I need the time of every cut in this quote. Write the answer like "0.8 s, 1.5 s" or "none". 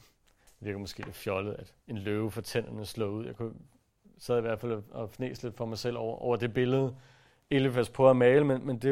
1.8 s